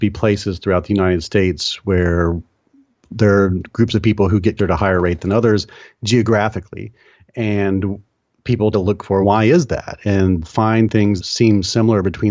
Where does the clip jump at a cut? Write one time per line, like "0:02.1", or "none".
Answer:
0:04.6
0:08.7
0:09.2
0:10.4
0:11.2